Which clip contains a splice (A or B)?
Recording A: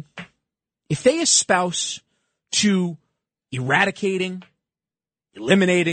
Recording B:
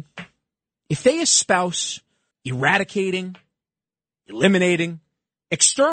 B